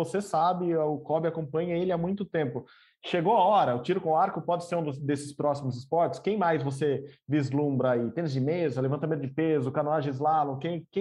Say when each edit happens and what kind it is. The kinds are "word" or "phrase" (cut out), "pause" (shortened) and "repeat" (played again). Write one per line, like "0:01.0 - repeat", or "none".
none